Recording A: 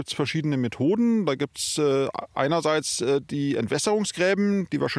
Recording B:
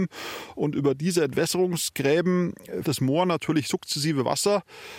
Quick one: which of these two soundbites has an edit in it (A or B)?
B